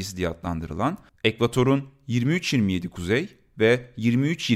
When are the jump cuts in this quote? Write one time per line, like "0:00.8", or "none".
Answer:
none

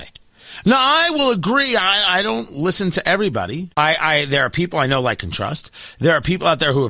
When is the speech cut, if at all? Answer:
0:03.7

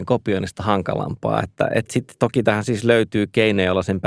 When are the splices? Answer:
none

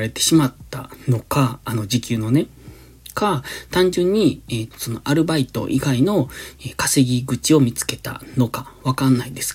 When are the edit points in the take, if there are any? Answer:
0:04.7

